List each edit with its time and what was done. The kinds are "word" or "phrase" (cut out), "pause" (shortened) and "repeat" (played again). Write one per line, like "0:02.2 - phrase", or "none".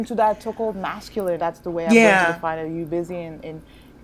0:01.4 - word